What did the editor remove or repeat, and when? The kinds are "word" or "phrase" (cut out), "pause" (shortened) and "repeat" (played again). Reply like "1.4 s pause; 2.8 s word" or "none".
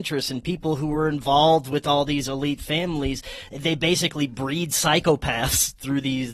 none